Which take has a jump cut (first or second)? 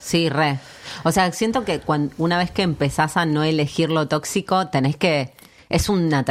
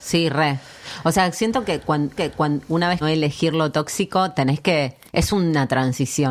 second